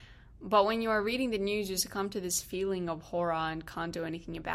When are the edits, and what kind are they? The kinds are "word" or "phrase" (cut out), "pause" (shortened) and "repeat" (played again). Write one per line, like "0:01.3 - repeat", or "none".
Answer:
none

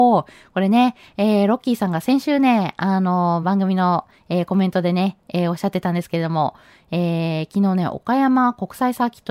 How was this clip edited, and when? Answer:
none

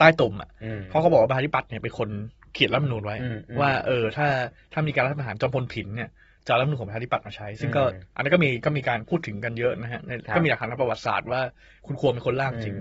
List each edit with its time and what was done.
none

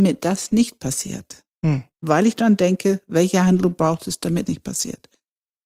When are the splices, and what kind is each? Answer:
0:01.9 - pause
0:04.4 - word

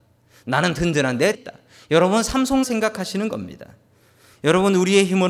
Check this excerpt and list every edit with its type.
0:01.3 - word
0:02.6 - word

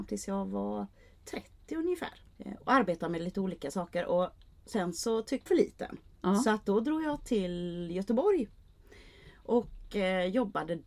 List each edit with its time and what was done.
0:02.3 - pause
0:05.5 - phrase

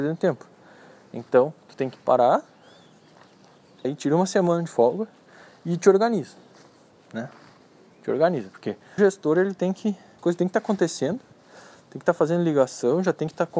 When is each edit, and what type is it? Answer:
0:03.8 - word
0:09.0 - word
0:10.2 - word

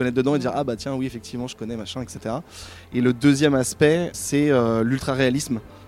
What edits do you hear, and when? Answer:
0:04.1 - word

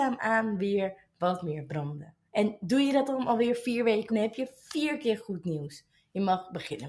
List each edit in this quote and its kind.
0:02.3 - pause
0:04.1 - phrase

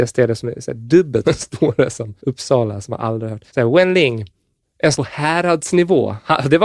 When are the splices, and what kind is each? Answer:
0:01.2 - word
0:02.2 - pause
0:03.5 - pause
0:04.9 - word

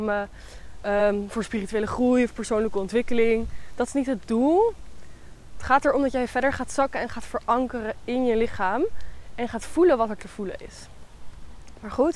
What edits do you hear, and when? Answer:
none

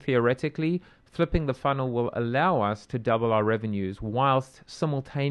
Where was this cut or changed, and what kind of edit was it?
none

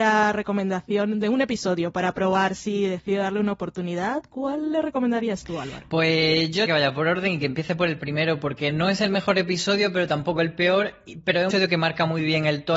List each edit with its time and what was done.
0:06.7 - phrase
0:11.5 - word

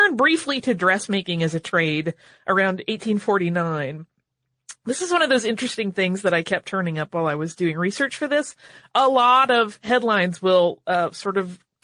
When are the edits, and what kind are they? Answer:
none

